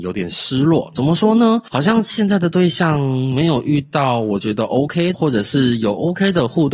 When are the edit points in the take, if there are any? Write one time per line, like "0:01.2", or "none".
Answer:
0:05.1

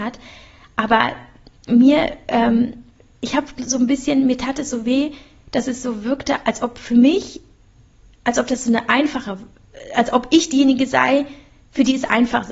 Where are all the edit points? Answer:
none

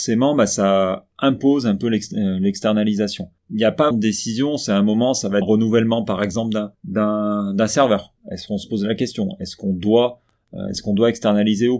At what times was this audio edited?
0:03.4
0:03.9
0:05.4
0:06.7
0:08.2

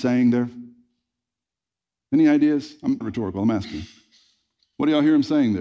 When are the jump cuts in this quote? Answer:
0:03.0

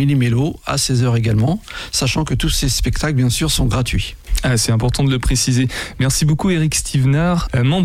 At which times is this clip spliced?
none

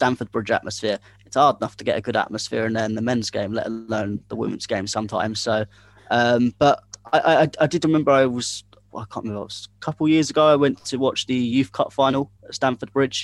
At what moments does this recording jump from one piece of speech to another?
none

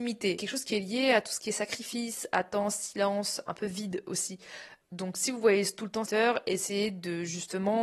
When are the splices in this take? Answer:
0:06.1

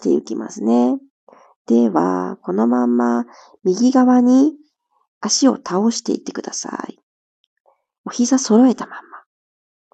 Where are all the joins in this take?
none

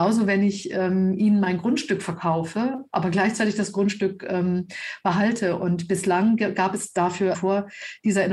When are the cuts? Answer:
0:07.3

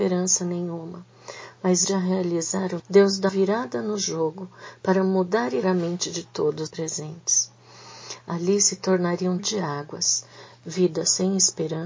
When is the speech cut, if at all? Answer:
0:01.8
0:02.8
0:03.3
0:05.6
0:06.7
0:09.4

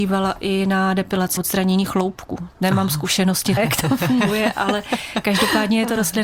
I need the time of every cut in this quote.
0:01.4
0:03.6

